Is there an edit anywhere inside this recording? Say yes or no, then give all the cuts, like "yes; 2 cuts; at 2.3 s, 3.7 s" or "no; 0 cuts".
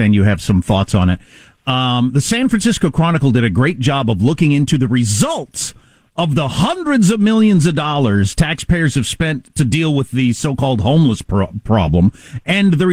no; 0 cuts